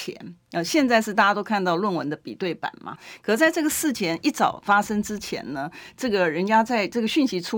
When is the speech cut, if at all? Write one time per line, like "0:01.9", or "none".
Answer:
0:03.0